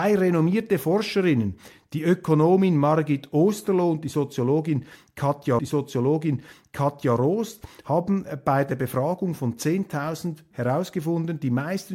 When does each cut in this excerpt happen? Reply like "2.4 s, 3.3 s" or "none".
5.6 s, 10.5 s